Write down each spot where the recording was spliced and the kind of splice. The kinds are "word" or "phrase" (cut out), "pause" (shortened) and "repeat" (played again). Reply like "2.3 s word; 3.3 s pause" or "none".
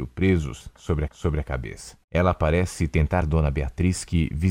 1.1 s repeat; 2.0 s pause; 3.2 s word